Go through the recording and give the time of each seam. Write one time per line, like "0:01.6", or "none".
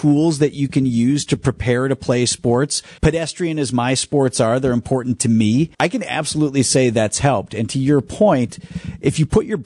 0:03.0
0:05.7